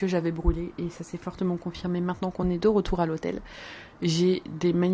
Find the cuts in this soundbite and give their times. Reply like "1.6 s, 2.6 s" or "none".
none

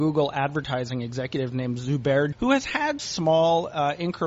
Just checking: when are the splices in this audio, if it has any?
2.3 s, 3.0 s

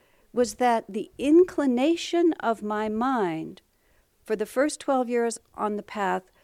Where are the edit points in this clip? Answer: none

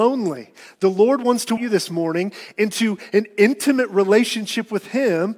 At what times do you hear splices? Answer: 1.6 s

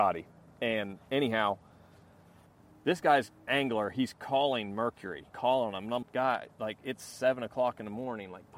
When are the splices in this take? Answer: 3.5 s, 5.3 s, 6.0 s

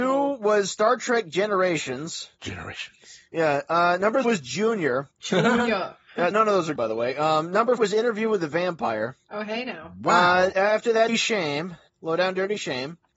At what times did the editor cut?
2.4 s, 4.2 s, 5.1 s, 6.3 s, 6.8 s, 7.8 s, 9.2 s, 10.5 s, 11.1 s

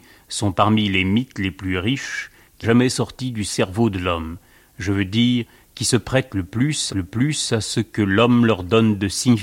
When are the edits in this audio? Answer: 2.6 s, 6.9 s

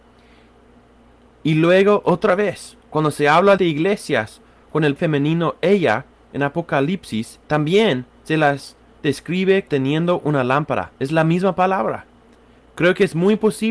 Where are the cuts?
3.6 s, 5.0 s, 7.4 s, 9.7 s, 10.9 s

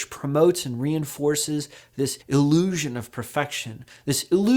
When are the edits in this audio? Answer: 2.2 s

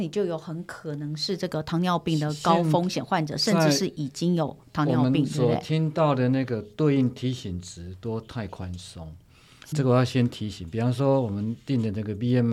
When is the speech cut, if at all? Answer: 9.7 s

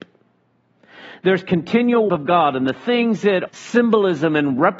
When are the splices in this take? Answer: 2.1 s, 3.5 s

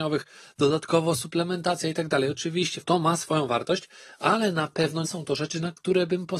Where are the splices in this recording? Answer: 2.8 s, 5.0 s

